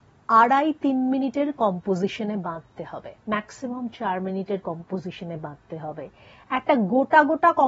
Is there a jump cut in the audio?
yes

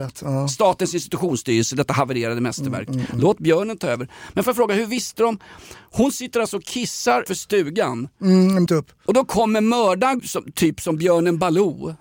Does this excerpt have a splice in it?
yes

